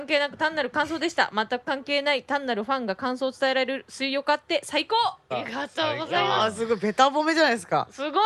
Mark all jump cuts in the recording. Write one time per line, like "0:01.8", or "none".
0:05.3